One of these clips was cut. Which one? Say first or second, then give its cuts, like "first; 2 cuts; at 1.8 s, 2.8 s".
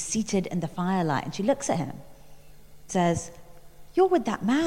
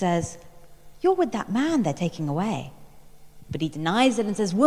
first; 1 cut; at 2.9 s